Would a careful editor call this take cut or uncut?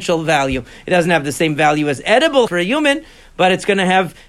cut